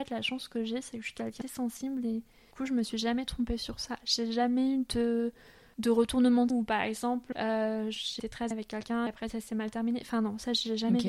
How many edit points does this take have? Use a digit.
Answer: 8